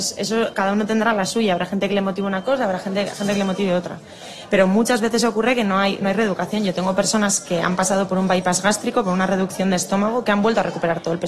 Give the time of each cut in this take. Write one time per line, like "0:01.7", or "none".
none